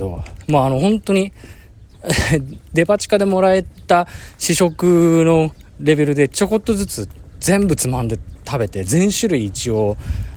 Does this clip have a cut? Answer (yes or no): no